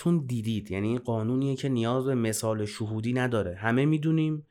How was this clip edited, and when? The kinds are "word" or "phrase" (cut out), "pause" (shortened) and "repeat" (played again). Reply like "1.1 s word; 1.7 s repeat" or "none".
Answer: none